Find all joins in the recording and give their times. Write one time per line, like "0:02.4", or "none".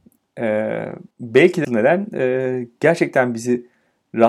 0:01.1
0:01.6